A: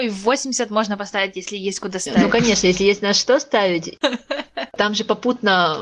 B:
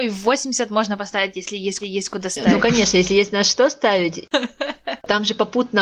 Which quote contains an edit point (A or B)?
B